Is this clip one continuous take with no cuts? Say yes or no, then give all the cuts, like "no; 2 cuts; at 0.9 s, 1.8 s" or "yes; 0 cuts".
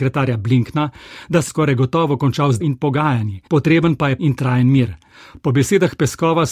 no; 4 cuts; at 1.5 s, 2.6 s, 3.5 s, 4.2 s